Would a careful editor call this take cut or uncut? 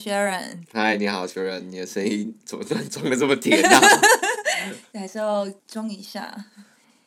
cut